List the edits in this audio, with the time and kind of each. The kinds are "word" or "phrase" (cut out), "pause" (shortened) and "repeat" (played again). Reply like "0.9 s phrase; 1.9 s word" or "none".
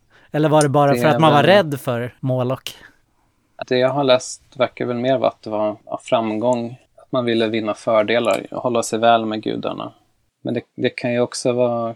2.2 s pause; 3.6 s word; 5.8 s pause; 6.9 s pause